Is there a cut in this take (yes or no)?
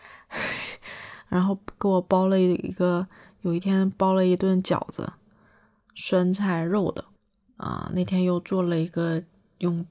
no